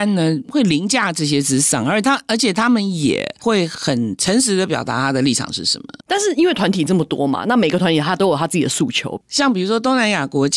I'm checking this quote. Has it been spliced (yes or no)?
yes